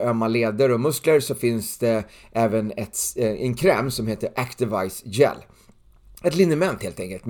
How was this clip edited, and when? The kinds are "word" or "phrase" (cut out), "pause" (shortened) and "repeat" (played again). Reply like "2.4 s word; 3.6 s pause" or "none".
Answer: none